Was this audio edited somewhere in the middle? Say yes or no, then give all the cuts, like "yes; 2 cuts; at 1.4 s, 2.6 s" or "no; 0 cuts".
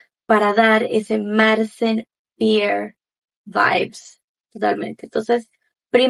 no; 0 cuts